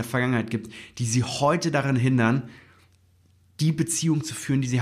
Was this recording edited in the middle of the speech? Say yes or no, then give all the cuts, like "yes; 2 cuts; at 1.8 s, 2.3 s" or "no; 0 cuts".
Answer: no; 0 cuts